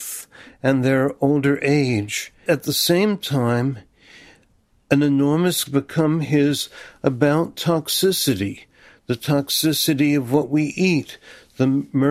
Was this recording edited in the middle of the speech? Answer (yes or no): yes